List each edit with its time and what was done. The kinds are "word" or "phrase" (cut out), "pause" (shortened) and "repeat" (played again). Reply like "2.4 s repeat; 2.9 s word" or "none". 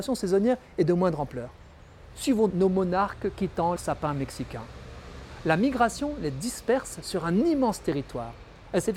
2.5 s word; 3.8 s word